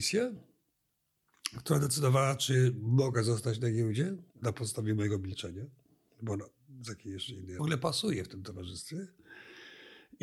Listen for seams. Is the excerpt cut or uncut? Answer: cut